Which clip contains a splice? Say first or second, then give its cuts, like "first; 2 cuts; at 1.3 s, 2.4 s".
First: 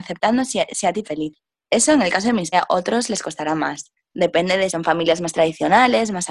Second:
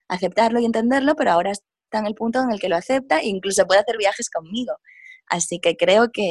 first; 4 cuts; at 1.0 s, 2.5 s, 4.0 s, 4.7 s